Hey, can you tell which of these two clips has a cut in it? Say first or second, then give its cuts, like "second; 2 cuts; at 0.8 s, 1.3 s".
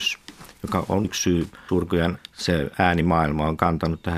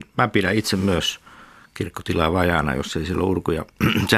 first; 3 cuts; at 1.0 s, 1.7 s, 2.2 s